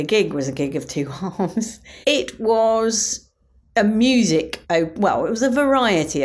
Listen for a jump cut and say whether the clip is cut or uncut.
cut